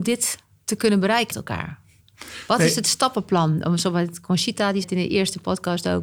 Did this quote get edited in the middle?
yes; 2 cuts; at 1.3 s, 4.8 s

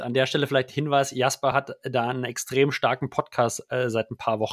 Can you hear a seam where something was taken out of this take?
no; 0 cuts

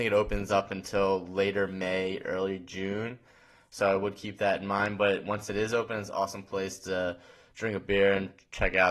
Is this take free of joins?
yes; 0 cuts

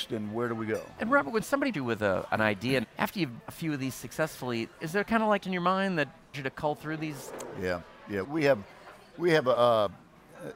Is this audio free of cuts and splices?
no; 6 cuts; at 1.7 s, 2.8 s, 3.4 s, 5.4 s, 6.3 s, 8.2 s

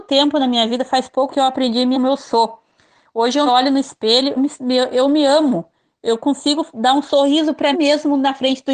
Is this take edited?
yes; 5 cuts; at 1.3 s, 1.9 s, 3.5 s, 4.4 s, 7.7 s

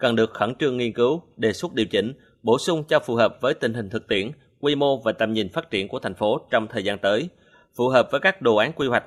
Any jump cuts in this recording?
no; 0 cuts

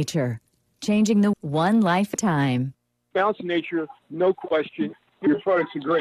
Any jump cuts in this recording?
yes; 3 cuts; at 1.3 s, 2.1 s, 4.0 s

